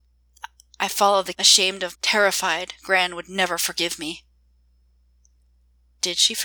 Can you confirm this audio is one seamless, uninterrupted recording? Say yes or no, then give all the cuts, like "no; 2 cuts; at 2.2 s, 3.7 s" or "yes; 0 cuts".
no; 2 cuts; at 1.3 s, 1.9 s